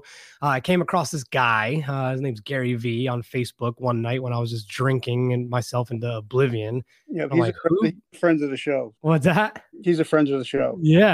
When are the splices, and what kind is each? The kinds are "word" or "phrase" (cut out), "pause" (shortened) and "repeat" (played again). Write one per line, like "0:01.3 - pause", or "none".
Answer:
0:09.0 - pause